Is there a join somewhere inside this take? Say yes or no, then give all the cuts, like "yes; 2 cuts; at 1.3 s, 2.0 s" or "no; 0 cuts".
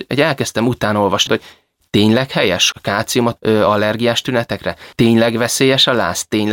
yes; 4 cuts; at 1.3 s, 2.7 s, 3.4 s, 4.9 s